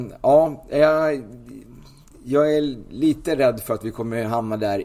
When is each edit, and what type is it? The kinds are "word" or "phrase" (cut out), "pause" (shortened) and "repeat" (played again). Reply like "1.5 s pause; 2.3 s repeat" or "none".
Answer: none